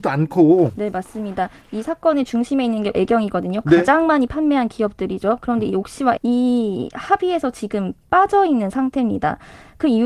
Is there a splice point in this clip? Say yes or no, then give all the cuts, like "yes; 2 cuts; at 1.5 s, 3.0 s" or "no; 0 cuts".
yes; 2 cuts; at 2.9 s, 6.2 s